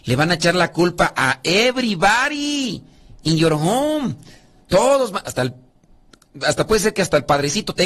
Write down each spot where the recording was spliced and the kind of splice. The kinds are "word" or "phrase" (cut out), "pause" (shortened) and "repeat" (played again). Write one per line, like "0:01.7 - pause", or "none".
none